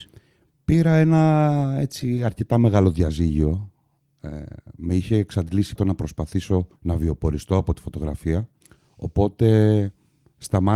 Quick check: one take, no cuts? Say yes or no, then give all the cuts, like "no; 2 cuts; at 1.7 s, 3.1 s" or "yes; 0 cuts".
no; 3 cuts; at 5.8 s, 6.8 s, 8.6 s